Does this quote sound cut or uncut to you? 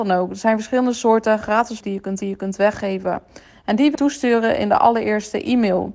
cut